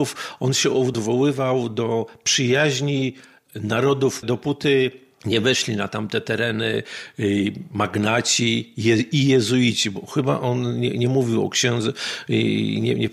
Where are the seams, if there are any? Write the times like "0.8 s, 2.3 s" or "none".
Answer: 4.2 s